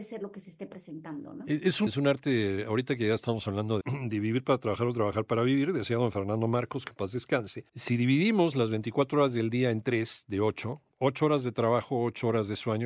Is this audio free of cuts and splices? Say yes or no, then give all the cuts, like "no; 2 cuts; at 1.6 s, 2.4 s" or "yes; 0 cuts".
no; 4 cuts; at 1.9 s, 3.8 s, 7.7 s, 10.9 s